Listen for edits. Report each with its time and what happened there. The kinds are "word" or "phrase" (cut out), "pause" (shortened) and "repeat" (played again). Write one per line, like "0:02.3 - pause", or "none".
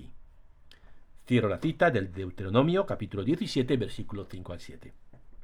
none